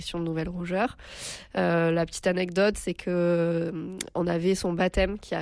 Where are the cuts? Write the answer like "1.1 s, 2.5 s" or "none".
none